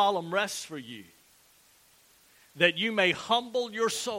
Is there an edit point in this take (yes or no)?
no